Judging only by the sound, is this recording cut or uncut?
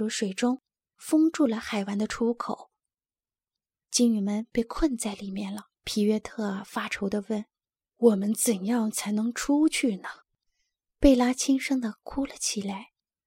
cut